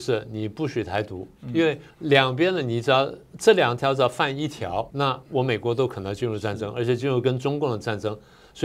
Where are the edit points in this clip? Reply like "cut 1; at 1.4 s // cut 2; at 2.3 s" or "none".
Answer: cut 1; at 1.9 s // cut 2; at 4.9 s